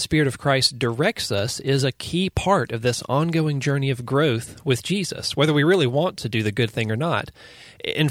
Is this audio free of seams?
yes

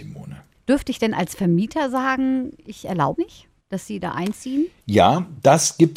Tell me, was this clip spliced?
yes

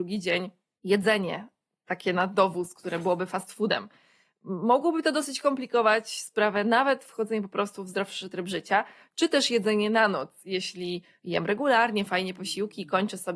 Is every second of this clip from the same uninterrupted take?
yes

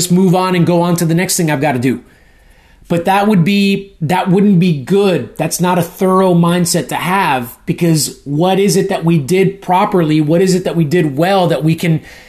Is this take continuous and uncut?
yes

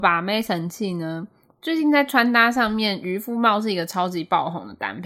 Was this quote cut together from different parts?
no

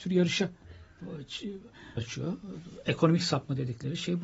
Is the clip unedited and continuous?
no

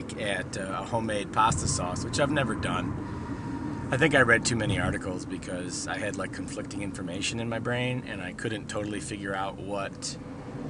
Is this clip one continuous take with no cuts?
yes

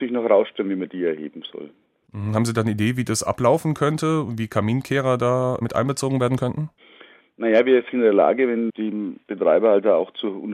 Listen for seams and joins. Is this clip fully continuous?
no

